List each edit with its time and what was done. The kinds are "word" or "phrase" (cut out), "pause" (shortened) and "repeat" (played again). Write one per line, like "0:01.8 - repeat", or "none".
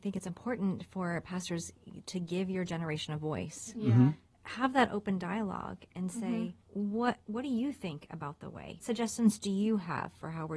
0:08.8 - word